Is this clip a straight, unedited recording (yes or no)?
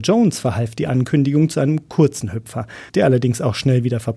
no